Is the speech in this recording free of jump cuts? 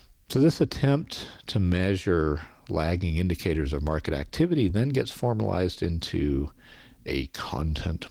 yes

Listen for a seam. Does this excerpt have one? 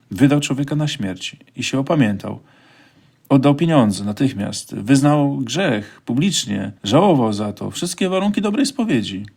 yes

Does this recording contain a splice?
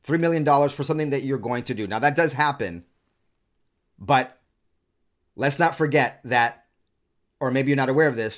no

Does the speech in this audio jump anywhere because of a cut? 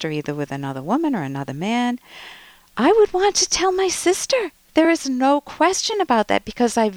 no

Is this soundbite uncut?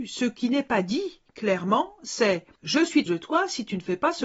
no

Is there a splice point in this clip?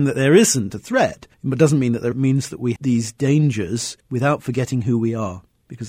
yes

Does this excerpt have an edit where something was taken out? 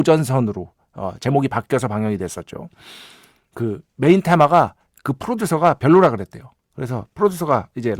no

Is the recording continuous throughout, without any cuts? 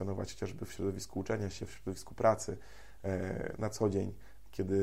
yes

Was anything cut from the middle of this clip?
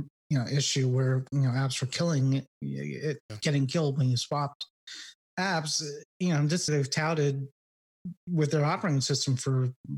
yes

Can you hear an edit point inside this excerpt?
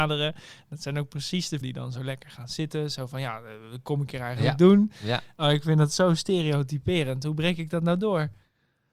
yes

